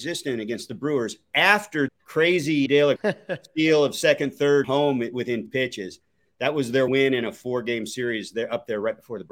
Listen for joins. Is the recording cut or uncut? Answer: cut